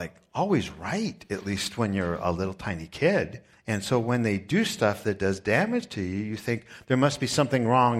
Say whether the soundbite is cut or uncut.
cut